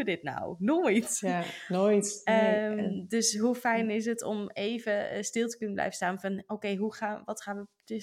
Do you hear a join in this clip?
no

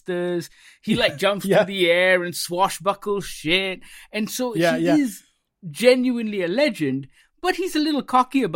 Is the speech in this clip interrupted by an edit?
no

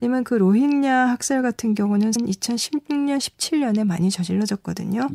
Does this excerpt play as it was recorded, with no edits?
no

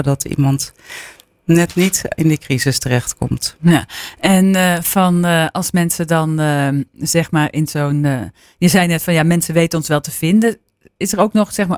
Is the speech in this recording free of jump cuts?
yes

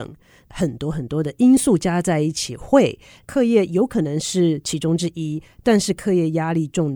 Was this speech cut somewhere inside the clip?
no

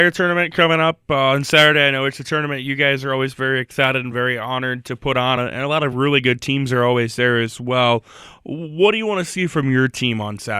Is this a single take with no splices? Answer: yes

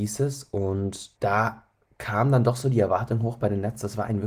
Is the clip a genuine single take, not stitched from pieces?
no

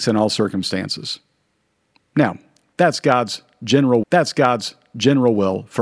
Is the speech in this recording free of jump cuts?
no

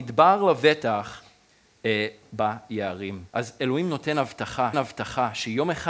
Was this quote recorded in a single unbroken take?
no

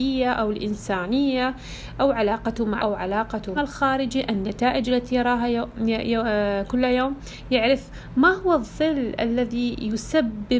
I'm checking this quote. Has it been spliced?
yes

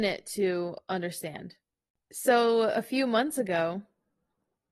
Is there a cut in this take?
no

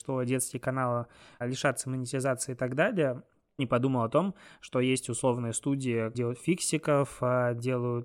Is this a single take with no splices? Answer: no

